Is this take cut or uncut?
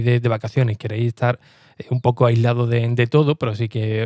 uncut